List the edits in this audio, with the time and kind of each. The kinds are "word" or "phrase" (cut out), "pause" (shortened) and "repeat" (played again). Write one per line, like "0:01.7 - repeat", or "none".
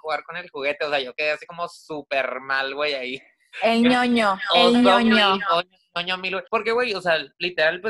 0:06.5 - pause